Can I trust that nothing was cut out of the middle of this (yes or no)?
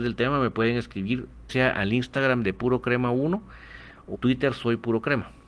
no